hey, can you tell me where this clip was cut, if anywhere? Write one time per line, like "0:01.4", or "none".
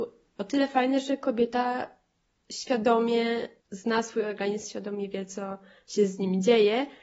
0:03.6

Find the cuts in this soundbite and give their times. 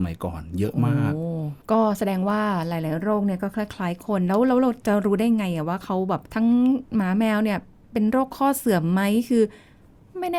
0:01.6
0:06.3
0:06.8

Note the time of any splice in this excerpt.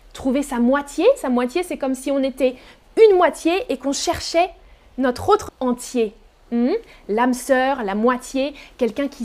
0:05.5

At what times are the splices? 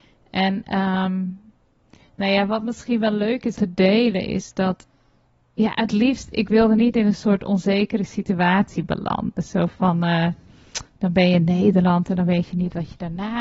0:03.6

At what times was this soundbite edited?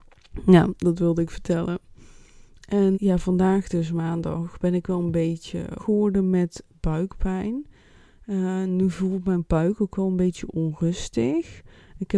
0:02.9
0:05.8

